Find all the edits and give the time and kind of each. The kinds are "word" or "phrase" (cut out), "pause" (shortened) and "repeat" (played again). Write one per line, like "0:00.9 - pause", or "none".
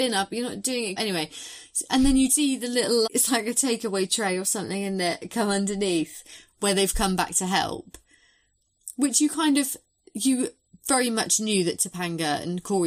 0:01.0 - word
0:02.3 - word
0:03.0 - word